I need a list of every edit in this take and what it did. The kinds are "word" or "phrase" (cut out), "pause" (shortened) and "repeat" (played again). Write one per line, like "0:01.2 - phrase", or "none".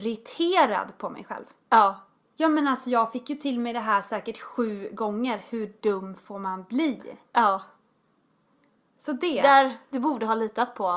none